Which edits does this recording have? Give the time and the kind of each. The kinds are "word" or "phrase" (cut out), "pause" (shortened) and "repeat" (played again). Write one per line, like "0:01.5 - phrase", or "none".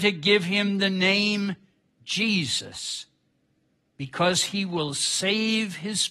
none